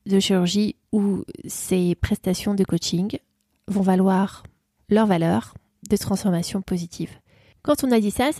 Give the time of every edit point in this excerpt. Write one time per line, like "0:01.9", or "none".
none